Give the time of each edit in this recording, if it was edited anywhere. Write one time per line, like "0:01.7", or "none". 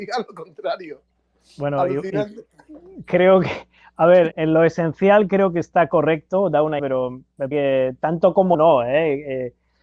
0:04.3
0:06.8
0:07.5
0:08.5